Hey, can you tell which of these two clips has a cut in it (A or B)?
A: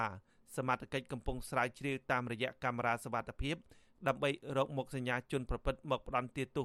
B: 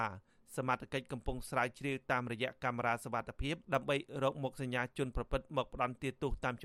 B